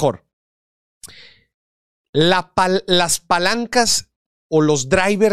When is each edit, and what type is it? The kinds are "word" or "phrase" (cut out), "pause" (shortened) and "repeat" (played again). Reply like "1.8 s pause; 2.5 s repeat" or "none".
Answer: none